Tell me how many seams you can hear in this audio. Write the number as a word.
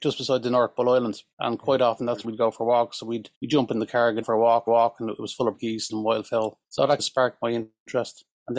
nine